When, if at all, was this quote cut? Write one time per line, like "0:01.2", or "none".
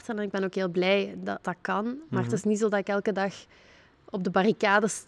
0:01.4